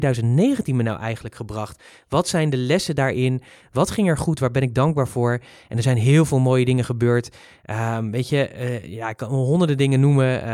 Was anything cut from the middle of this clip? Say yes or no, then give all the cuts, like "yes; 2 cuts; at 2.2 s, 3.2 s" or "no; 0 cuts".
no; 0 cuts